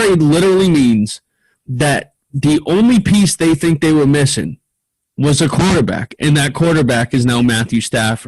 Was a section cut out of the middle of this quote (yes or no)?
no